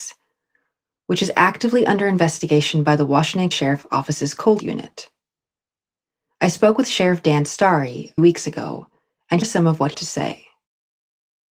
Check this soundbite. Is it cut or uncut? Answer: cut